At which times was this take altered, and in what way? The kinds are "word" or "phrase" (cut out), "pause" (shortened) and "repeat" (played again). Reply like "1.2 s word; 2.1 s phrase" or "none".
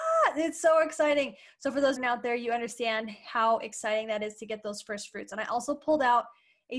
2.0 s phrase